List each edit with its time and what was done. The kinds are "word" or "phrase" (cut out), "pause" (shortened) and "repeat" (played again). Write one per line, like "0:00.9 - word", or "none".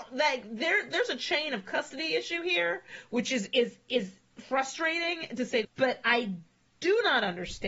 0:05.6 - word

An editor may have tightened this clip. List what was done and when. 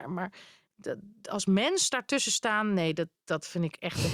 none

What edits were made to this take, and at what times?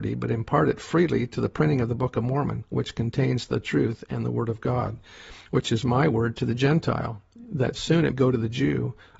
0:08.1 - word

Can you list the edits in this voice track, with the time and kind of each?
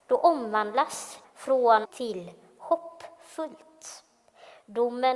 0:01.2 - word
0:01.9 - word

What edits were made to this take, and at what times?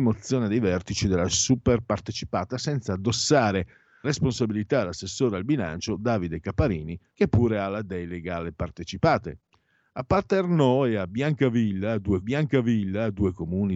0:04.0 - word
0:07.1 - pause
0:12.2 - repeat

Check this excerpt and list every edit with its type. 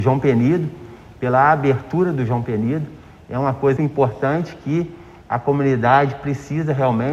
0:03.8 - word

